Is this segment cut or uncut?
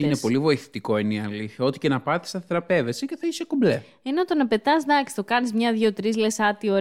uncut